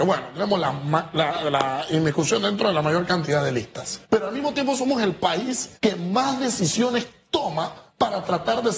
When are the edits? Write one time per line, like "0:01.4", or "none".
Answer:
0:04.0
0:05.8